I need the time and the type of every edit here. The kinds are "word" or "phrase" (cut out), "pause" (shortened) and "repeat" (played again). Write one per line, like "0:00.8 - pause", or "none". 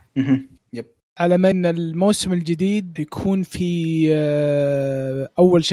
0:01.5 - word
0:03.0 - word